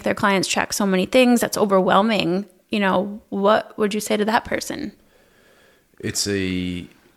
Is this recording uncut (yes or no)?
yes